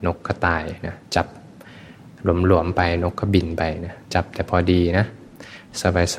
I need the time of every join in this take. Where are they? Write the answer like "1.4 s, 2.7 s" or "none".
1.0 s, 4.0 s